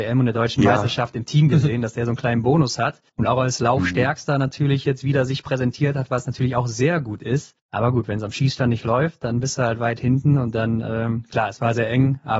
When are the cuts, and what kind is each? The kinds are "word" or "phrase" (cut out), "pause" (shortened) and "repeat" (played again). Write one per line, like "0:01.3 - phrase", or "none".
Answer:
0:03.1 - pause